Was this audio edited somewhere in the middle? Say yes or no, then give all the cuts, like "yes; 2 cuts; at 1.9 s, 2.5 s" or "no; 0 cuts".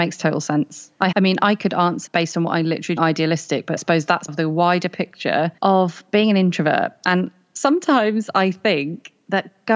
yes; 6 cuts; at 1.1 s, 2.1 s, 3.0 s, 3.8 s, 4.3 s, 5.6 s